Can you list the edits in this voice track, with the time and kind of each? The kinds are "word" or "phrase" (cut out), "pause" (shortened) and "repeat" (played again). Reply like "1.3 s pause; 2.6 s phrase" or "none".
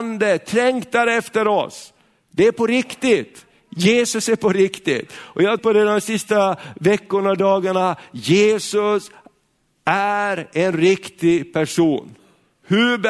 5.6 s word